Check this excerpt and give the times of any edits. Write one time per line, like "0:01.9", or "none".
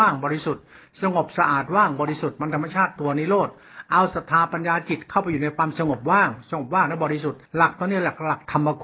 0:07.5